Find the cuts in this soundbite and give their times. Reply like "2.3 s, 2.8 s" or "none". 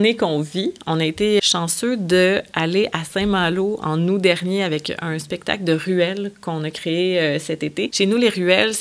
1.4 s